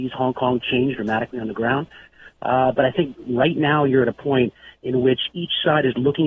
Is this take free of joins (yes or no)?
yes